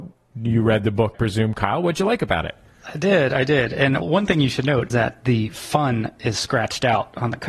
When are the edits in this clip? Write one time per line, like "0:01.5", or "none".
0:01.1
0:04.0
0:04.9